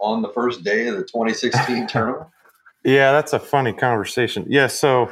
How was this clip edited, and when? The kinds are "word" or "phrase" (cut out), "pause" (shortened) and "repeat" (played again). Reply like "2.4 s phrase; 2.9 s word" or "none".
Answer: 2.7 s pause